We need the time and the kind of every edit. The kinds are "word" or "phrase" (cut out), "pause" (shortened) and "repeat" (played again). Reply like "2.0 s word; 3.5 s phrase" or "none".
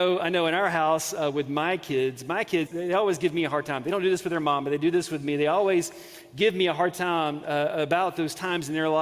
2.7 s word